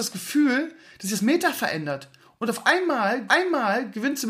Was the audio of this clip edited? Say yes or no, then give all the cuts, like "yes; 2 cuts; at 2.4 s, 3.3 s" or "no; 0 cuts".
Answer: yes; 1 cut; at 3.3 s